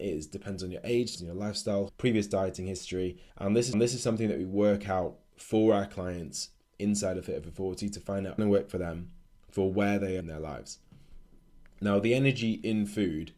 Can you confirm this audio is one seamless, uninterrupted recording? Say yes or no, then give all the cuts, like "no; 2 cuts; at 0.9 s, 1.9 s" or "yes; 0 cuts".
no; 8 cuts; at 1.1 s, 1.9 s, 3.3 s, 3.7 s, 8.4 s, 9.3 s, 10.2 s, 11.7 s